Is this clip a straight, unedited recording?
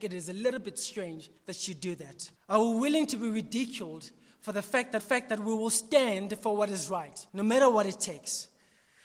no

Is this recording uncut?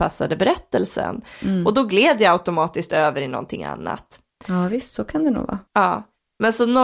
no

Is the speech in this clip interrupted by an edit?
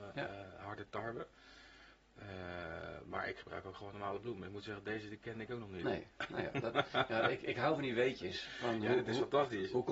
no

